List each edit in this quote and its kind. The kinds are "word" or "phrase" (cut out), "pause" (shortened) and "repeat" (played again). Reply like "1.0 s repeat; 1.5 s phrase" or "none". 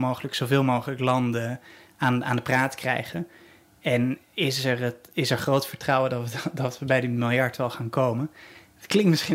none